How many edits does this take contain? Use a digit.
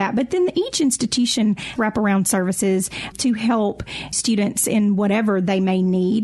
3